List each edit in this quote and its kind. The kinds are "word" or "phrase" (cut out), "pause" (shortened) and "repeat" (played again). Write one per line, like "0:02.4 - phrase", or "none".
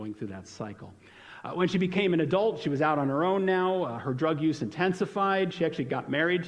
none

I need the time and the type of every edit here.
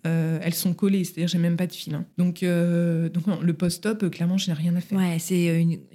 none

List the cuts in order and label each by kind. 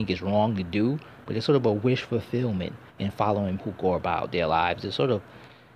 0:02.9 - pause
0:03.6 - word

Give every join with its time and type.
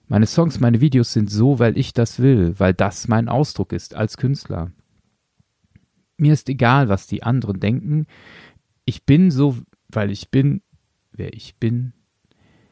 0:09.8 - pause

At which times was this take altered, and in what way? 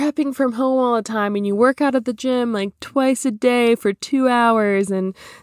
none

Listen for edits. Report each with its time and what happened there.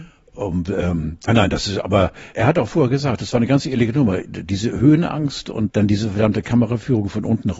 0:01.3 - word
0:02.3 - word
0:05.7 - word

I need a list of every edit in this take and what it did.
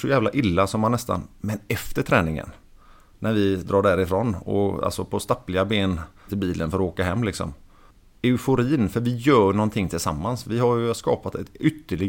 0:06.3 - phrase

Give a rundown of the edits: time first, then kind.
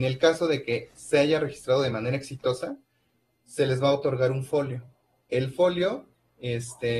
none

